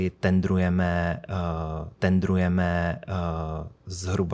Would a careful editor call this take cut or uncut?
cut